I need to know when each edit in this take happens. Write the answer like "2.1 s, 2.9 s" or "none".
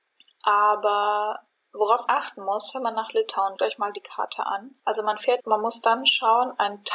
2.1 s, 3.6 s, 4.8 s, 5.4 s